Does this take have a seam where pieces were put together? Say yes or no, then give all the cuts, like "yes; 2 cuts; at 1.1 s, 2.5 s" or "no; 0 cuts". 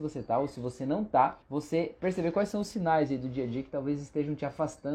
yes; 1 cut; at 1.4 s